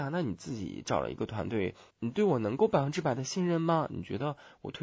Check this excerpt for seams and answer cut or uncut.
cut